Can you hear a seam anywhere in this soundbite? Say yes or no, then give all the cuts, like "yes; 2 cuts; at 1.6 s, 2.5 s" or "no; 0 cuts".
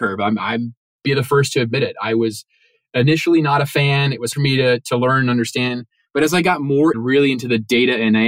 yes; 2 cuts; at 4.3 s, 6.9 s